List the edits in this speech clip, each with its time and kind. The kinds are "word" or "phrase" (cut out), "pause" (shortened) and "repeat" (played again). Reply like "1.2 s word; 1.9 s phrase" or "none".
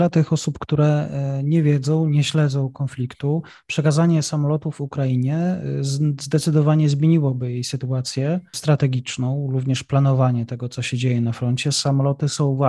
none